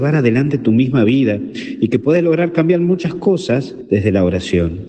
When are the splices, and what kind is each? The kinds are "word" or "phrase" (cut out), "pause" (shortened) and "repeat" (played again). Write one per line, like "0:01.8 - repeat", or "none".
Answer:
none